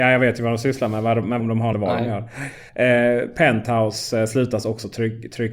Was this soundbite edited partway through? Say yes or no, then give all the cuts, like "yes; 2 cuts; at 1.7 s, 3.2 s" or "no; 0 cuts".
yes; 3 cuts; at 1.4 s, 1.7 s, 2.7 s